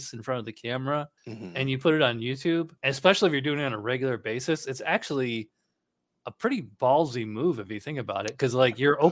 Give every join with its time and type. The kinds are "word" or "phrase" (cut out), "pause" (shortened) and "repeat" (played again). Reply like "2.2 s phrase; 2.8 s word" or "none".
1.2 s pause; 2.8 s pause